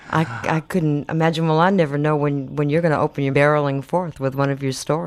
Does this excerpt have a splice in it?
yes; 1 cut; at 3.3 s

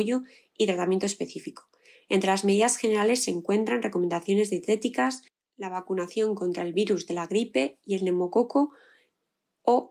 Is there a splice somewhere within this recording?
no; 0 cuts

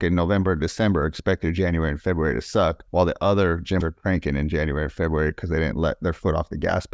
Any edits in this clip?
yes; 2 cuts; at 2.9 s, 3.8 s

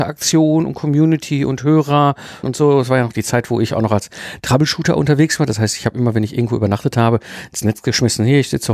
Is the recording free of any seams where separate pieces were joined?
no; 1 cut; at 2.4 s

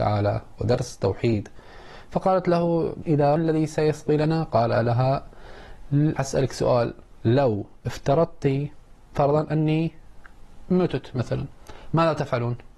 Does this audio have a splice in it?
yes; 3 cuts; at 3.0 s, 3.4 s, 6.2 s

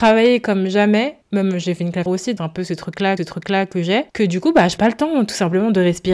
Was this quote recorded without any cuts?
no; 6 cuts; at 1.2 s, 2.1 s, 2.4 s, 3.2 s, 4.1 s, 4.8 s

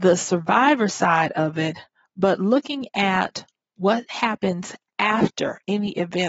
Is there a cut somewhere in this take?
no; 0 cuts

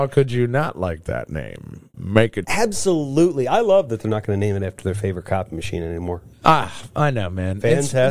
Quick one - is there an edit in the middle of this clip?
yes; 1 cut; at 2.4 s

